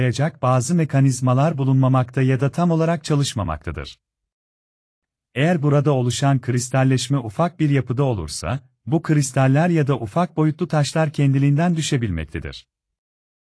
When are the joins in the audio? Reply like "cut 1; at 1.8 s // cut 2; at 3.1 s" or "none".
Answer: none